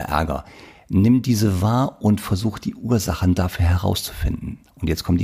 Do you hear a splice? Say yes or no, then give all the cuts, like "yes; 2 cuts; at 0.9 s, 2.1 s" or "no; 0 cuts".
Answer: no; 0 cuts